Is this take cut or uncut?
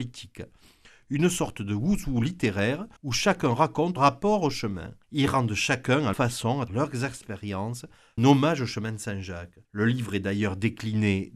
cut